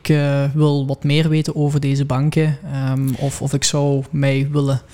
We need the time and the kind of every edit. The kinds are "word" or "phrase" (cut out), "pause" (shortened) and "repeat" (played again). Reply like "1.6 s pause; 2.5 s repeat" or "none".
none

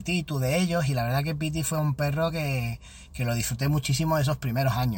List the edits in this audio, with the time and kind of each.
none

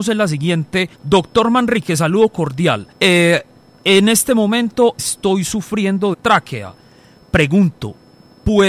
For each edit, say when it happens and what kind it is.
0.9 s pause; 2.9 s pause; 5.0 s word; 6.1 s phrase

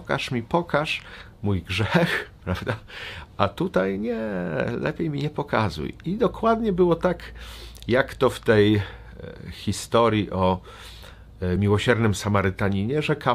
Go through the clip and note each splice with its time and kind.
none

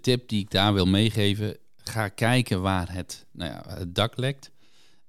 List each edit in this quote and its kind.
none

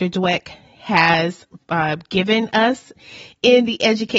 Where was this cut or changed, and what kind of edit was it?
none

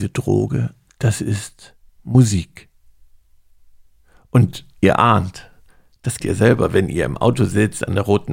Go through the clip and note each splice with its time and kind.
1.9 s pause; 6.2 s word

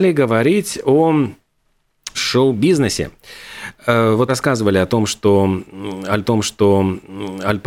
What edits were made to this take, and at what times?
2.1 s word; 4.3 s word; 6.2 s repeat

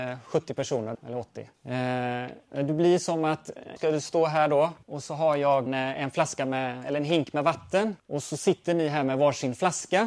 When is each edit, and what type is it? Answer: 0.9 s word; 1.5 s pause; 3.8 s word; 4.8 s pause; 5.7 s word; 8.0 s pause

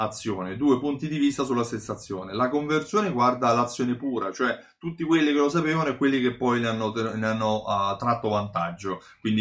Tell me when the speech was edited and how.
none

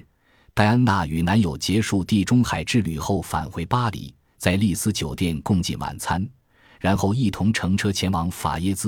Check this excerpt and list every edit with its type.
none

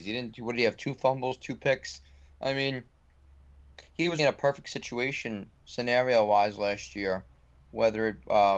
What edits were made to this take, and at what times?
4.2 s word

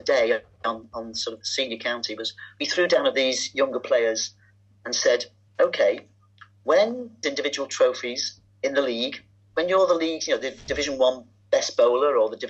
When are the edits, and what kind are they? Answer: 3.1 s phrase; 5.5 s pause; 7.2 s phrase

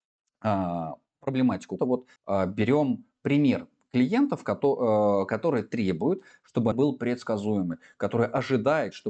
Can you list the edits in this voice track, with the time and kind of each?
1.8 s word; 2.2 s pause; 6.7 s word

